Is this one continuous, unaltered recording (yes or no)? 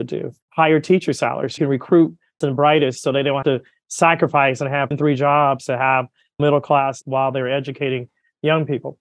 no